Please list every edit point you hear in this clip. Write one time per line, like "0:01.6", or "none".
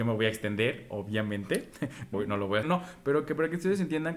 0:02.1
0:02.6